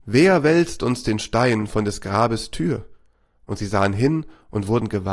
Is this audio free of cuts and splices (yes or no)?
yes